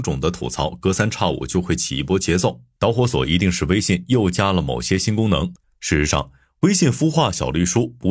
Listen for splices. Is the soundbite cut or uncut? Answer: cut